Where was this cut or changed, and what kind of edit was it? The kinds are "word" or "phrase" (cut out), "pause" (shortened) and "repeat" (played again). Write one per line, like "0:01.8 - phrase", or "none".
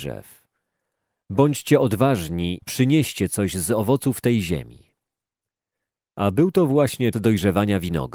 0:02.6 - word
0:07.1 - word